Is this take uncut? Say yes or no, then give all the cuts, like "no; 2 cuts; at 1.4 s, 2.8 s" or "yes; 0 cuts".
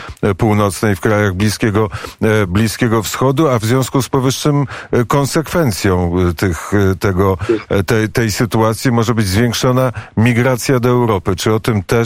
yes; 0 cuts